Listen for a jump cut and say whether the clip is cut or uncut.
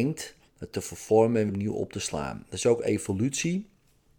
cut